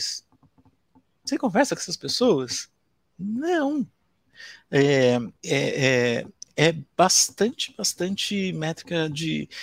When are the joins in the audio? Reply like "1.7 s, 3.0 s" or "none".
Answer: 5.4 s